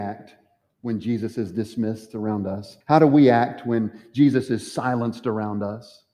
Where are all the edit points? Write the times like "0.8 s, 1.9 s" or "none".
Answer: 2.8 s